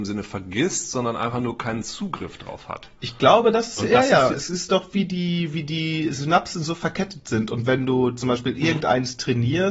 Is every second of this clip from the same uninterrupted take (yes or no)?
yes